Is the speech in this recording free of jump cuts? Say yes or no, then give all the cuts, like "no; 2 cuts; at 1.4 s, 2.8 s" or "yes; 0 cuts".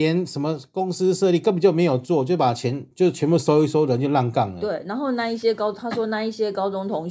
no; 1 cut; at 2.9 s